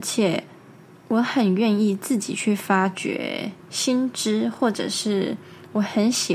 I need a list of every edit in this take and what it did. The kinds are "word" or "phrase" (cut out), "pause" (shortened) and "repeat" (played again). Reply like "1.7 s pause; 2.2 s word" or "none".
3.6 s pause